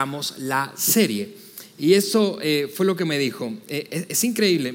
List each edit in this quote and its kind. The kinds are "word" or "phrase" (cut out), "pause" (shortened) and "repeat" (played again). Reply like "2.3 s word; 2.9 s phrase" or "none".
none